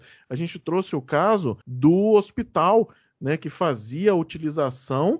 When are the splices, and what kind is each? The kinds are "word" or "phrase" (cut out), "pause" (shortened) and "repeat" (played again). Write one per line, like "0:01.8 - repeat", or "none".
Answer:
0:01.6 - pause